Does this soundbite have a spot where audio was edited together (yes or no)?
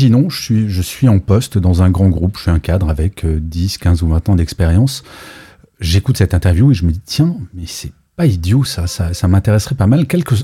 no